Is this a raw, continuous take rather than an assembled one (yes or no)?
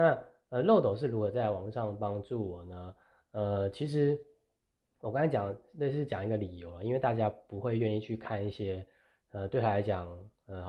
yes